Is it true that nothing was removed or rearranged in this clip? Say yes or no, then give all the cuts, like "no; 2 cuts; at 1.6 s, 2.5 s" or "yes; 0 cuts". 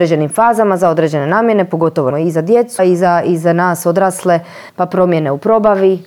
no; 3 cuts; at 2.1 s, 2.8 s, 4.7 s